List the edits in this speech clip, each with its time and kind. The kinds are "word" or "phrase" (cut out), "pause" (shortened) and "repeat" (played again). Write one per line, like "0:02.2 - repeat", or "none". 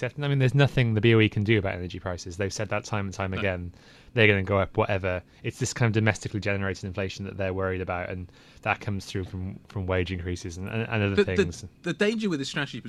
none